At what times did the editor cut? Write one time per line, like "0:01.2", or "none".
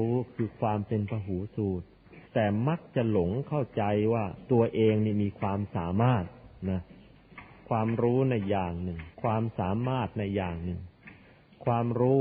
0:02.3
0:09.1